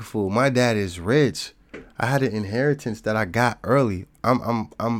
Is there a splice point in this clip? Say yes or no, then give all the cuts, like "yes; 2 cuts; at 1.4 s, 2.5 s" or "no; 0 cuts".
no; 0 cuts